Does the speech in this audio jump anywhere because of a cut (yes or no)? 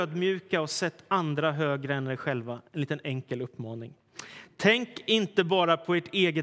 yes